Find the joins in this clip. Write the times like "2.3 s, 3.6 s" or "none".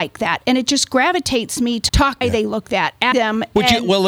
1.9 s, 2.2 s, 2.6 s, 3.1 s